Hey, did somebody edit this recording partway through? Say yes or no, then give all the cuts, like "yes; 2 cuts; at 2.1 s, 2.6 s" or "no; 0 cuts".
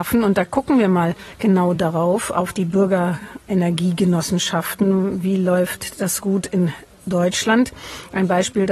no; 0 cuts